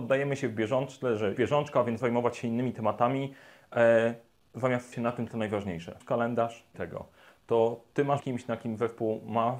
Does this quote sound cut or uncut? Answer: cut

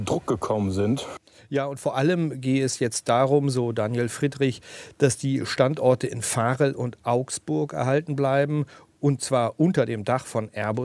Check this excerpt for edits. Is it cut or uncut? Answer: uncut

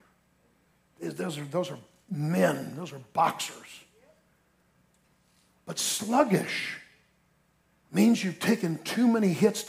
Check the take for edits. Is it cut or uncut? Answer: uncut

